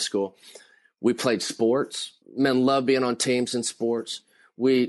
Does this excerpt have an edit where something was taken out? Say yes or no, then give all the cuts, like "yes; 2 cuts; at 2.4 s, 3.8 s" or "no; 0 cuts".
no; 0 cuts